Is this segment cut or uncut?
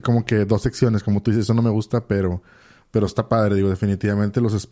uncut